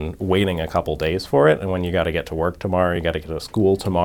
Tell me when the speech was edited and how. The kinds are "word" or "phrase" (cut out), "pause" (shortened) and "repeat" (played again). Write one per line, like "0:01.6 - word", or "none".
none